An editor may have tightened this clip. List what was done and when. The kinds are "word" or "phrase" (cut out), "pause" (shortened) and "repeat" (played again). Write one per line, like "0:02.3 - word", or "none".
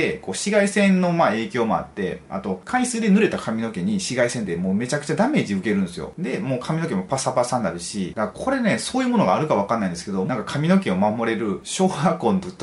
0:10.3 - phrase